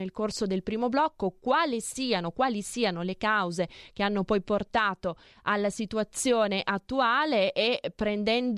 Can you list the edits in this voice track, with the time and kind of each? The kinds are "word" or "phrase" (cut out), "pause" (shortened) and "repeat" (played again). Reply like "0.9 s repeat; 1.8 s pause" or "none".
none